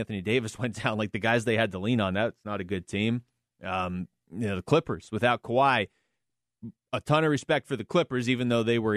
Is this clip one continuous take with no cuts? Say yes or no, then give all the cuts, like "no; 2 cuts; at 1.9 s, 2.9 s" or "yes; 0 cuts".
yes; 0 cuts